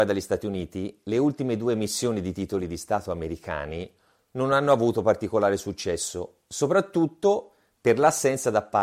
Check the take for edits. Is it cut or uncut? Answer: uncut